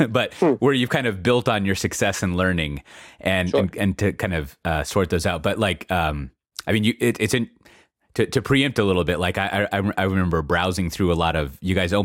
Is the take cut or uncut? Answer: uncut